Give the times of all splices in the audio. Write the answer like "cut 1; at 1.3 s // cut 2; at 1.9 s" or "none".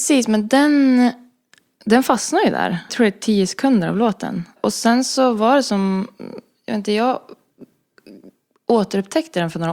cut 1; at 2.9 s